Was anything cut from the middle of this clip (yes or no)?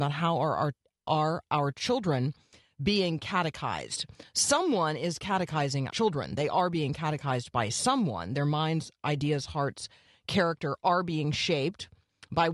yes